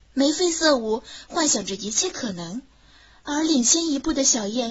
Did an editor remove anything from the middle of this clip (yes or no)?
no